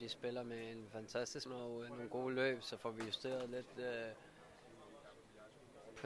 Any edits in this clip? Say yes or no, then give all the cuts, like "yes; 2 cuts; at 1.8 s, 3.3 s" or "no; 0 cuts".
yes; 1 cut; at 1.5 s